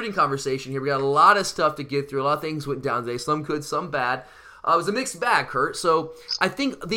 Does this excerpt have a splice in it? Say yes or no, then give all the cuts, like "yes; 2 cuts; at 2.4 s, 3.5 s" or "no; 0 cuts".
no; 0 cuts